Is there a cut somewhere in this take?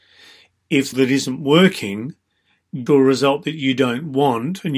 yes; 2 cuts; at 0.9 s, 2.9 s

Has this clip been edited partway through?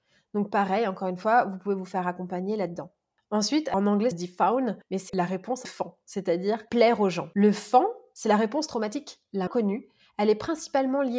yes; 4 cuts; at 4.1 s, 5.1 s, 5.6 s, 9.5 s

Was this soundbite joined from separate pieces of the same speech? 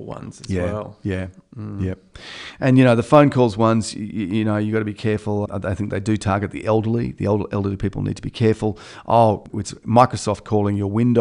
yes; 1 cut; at 5.5 s

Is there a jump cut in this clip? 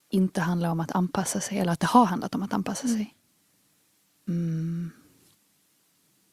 no; 0 cuts

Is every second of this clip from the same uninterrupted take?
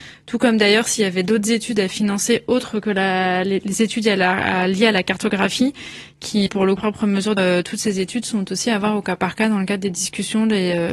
no; 3 cuts; at 6.5 s, 6.8 s, 7.4 s

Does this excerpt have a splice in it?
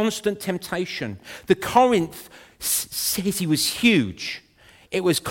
no; 0 cuts

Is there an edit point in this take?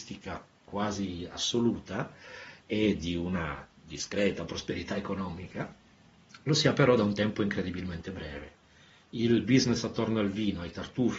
no; 0 cuts

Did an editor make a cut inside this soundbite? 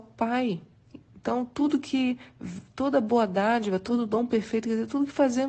no; 0 cuts

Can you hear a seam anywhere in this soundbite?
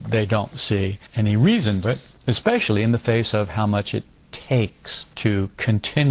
yes; 1 cut; at 1.8 s

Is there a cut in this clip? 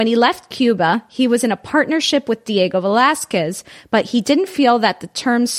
no; 0 cuts

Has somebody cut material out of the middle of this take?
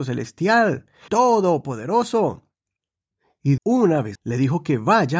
yes; 3 cuts; at 1.1 s, 3.6 s, 4.2 s

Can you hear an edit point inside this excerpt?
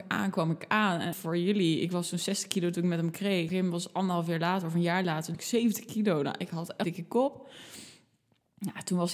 yes; 4 cuts; at 1.1 s, 3.5 s, 5.3 s, 6.8 s

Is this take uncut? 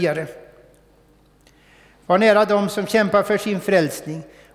yes; 0 cuts

